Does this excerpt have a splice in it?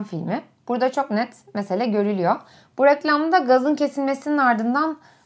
no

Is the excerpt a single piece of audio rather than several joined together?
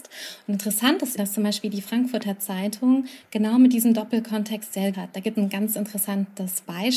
no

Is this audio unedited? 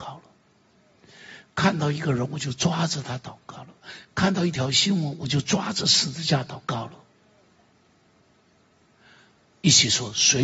yes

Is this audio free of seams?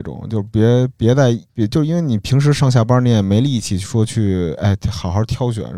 no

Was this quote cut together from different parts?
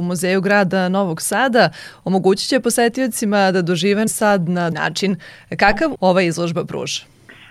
yes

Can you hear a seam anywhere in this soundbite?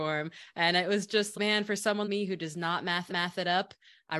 yes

